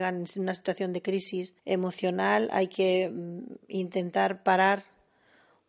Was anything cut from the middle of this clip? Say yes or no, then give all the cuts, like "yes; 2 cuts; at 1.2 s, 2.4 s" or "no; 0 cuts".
yes; 1 cut; at 1.6 s